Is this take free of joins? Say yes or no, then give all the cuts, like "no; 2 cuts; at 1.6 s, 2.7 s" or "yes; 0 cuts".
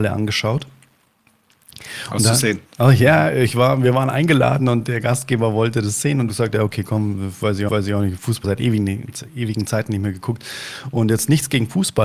no; 4 cuts; at 2.7 s, 6.3 s, 7.7 s, 8.4 s